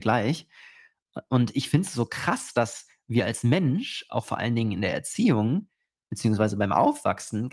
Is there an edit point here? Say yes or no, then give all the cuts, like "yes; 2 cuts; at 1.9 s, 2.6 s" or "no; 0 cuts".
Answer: no; 0 cuts